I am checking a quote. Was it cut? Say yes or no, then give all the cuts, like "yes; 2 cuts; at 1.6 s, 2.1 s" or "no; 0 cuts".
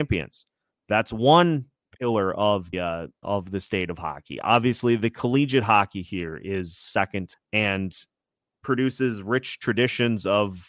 yes; 3 cuts; at 2.7 s, 3.2 s, 7.3 s